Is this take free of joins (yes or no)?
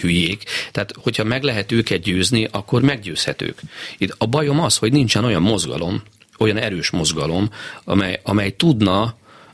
yes